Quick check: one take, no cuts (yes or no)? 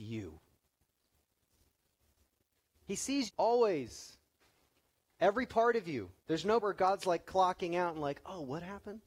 no